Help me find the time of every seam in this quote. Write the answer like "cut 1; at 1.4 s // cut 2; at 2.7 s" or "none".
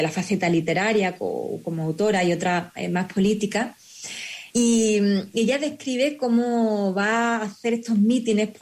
cut 1; at 4.5 s